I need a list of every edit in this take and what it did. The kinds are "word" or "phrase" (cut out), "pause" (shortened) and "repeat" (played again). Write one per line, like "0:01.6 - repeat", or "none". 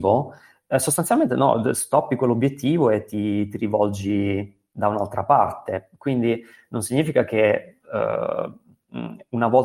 none